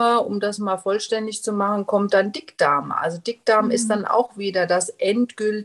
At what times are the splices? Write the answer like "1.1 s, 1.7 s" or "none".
none